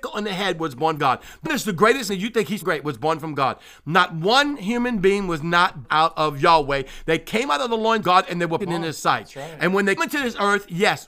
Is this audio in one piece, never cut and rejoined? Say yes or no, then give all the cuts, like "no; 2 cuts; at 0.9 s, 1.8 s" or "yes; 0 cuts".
no; 8 cuts; at 1.0 s, 1.4 s, 2.1 s, 2.6 s, 5.8 s, 8.0 s, 8.6 s, 10.0 s